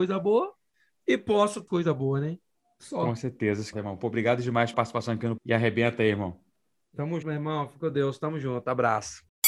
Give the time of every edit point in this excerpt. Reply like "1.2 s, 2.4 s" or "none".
1.7 s, 3.7 s, 4.7 s, 5.4 s, 7.2 s